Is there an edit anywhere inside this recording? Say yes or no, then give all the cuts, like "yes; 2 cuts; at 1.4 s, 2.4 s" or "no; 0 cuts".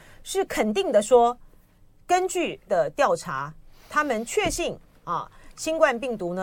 yes; 1 cut; at 2.7 s